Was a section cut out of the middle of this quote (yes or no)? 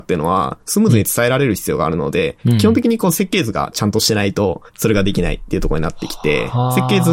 yes